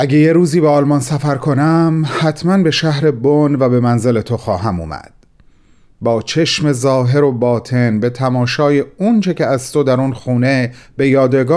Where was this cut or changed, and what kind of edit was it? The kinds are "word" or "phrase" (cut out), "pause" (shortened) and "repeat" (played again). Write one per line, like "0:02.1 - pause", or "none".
none